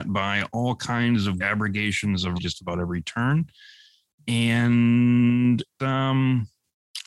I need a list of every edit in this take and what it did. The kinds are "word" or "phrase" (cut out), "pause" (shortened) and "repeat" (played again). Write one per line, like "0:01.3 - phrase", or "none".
0:01.4 - word
0:02.4 - word
0:05.8 - word